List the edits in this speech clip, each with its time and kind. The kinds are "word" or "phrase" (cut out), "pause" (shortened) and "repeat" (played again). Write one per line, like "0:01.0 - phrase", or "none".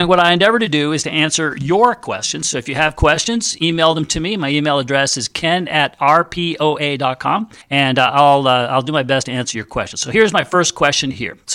0:07.6 - pause

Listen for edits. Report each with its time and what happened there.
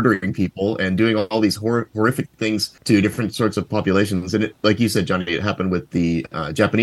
0:02.8 - pause

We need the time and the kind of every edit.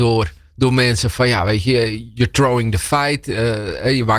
none

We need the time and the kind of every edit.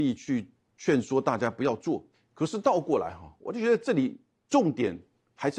none

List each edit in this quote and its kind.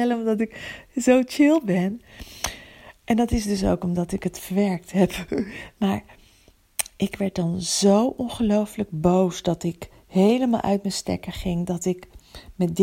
none

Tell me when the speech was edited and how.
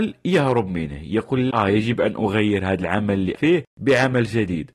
0:01.5 - word
0:03.3 - word

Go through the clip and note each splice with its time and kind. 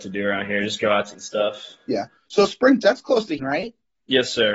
0:01.1 - word
0:02.8 - word
0:03.4 - word

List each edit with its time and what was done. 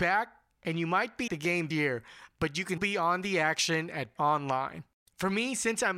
0:01.3 - word
0:01.7 - word
0:02.8 - word
0:04.2 - word

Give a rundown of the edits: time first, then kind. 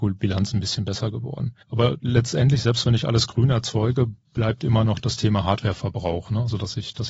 0:01.6 - pause

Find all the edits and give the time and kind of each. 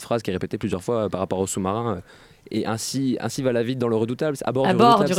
none

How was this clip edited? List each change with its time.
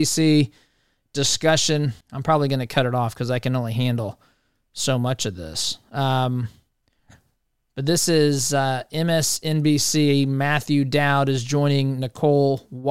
0:02.0 - pause

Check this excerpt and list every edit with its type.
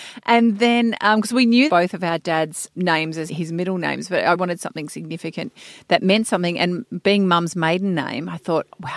0:01.7 - phrase
0:02.7 - word
0:03.3 - word
0:04.3 - word

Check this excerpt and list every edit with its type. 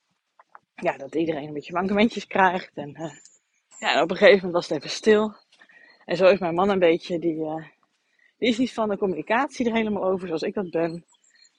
none

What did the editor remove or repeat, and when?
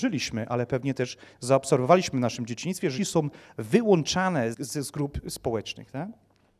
0:03.0 - phrase
0:04.5 - word

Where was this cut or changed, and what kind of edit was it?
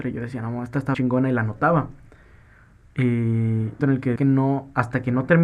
0:00.9 - word
0:03.8 - phrase
0:04.2 - phrase

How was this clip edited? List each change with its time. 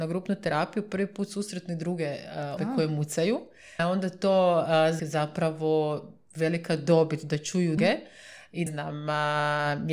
0:02.6 - word
0:03.8 - word
0:05.0 - word
0:07.8 - word
0:08.7 - phrase

